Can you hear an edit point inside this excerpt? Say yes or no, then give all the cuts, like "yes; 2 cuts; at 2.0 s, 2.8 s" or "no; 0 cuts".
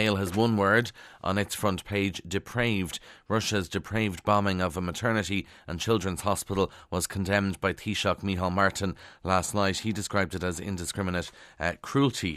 no; 0 cuts